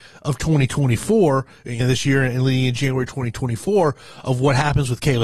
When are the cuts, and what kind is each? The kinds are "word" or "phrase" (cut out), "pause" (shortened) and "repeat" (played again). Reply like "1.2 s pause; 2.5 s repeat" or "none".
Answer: 1.8 s phrase